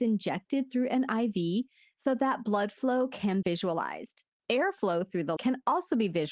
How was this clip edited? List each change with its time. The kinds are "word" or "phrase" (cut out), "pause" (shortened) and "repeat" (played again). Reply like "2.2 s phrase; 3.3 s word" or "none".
3.4 s word; 5.4 s word